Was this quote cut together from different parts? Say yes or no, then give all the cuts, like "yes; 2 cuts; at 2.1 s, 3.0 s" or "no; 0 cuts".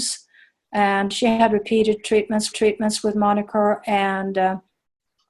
yes; 1 cut; at 2.5 s